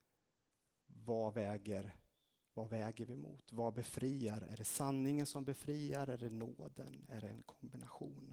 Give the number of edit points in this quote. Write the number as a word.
zero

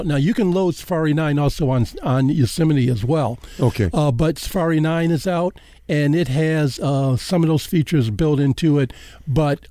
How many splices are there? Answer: one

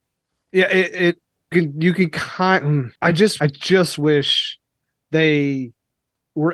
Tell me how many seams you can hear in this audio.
three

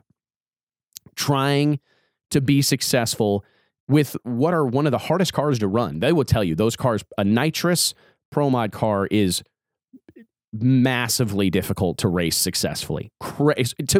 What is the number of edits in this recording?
zero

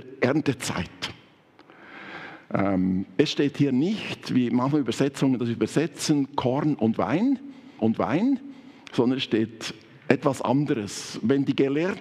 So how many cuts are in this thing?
one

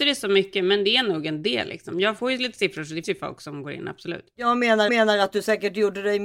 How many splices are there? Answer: two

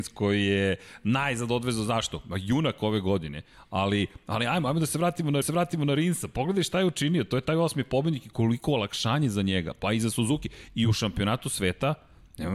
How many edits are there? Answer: one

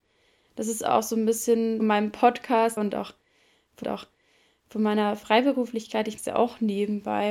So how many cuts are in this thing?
four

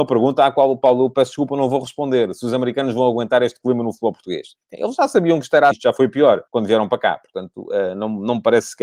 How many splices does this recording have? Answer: two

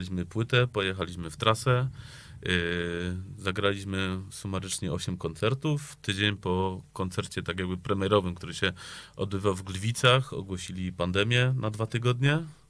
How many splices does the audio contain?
zero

